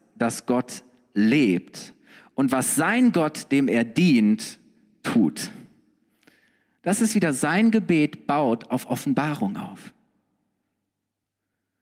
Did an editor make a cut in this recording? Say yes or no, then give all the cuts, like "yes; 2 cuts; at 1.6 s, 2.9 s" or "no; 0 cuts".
no; 0 cuts